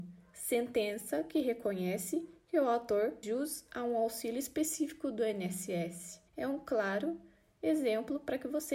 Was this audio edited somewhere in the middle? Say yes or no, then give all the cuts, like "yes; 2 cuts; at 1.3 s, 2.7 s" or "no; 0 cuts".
yes; 2 cuts; at 3.2 s, 6.3 s